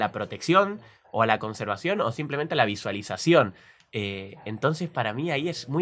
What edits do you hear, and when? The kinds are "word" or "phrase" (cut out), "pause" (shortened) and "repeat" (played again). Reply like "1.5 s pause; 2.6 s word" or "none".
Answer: none